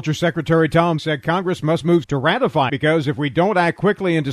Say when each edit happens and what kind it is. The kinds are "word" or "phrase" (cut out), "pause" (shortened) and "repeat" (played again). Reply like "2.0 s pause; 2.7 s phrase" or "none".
1.0 s word; 2.0 s word; 2.7 s word

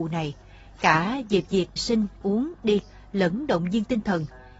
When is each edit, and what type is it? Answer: 1.8 s word; 2.2 s word; 2.8 s word

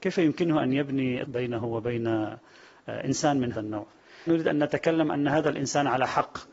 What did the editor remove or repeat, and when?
1.2 s word; 3.5 s word; 4.3 s word

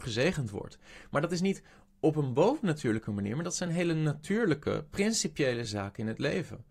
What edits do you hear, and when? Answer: none

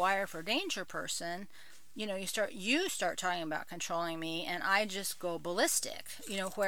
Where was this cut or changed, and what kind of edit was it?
none

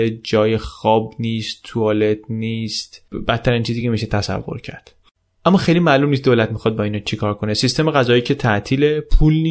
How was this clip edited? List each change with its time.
none

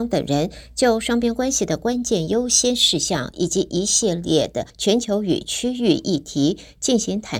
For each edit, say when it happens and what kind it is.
4.7 s pause

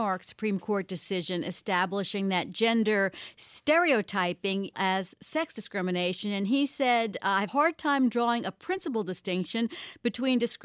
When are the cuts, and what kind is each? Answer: 4.7 s phrase; 7.5 s word

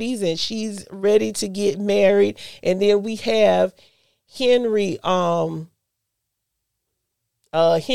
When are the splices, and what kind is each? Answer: none

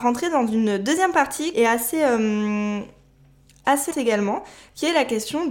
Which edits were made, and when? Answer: 1.5 s word; 3.9 s word

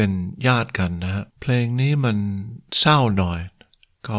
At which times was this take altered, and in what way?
1.3 s pause

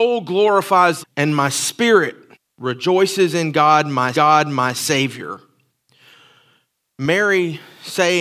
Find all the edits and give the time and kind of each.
1.0 s phrase; 2.3 s pause; 4.1 s repeat

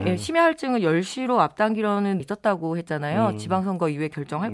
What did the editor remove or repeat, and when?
2.2 s word

